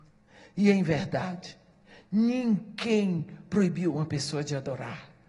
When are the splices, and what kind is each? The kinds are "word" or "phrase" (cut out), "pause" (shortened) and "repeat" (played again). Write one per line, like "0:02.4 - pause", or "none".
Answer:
0:03.5 - word